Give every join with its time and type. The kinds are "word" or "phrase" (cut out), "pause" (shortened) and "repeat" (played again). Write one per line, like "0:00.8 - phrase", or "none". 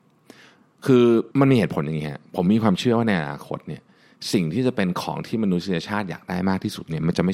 0:01.3 - pause